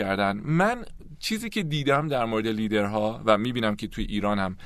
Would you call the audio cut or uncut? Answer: uncut